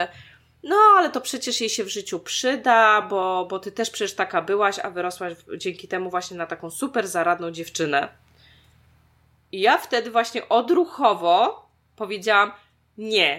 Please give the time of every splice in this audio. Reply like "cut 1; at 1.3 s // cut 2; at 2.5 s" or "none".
none